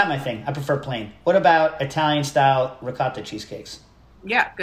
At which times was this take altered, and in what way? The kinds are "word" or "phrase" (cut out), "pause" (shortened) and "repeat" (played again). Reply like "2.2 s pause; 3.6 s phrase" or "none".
none

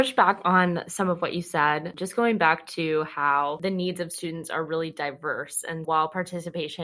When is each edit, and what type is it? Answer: 5.8 s word

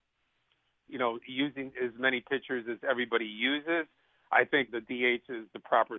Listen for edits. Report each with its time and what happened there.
4.7 s word

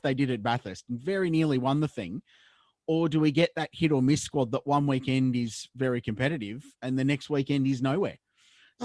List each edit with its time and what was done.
none

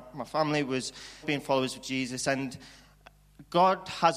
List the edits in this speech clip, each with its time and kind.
1.2 s word

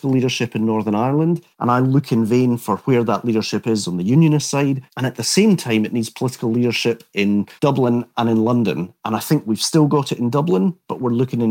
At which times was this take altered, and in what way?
1.5 s pause; 4.9 s pause; 7.6 s pause

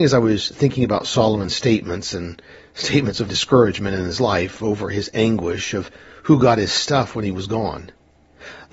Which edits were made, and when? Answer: 3.3 s word

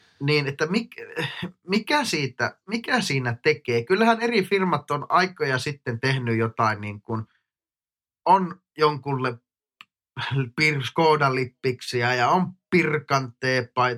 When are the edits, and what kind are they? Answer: none

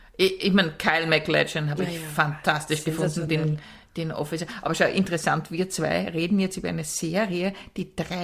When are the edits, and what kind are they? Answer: none

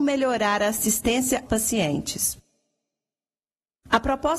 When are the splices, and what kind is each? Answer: 1.5 s word

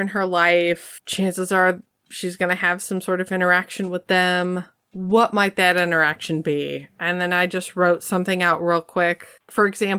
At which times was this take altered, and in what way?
none

